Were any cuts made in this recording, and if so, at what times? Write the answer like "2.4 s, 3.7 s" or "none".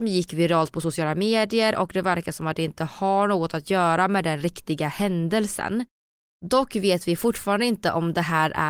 none